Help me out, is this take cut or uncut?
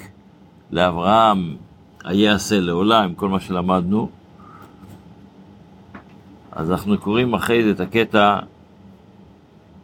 uncut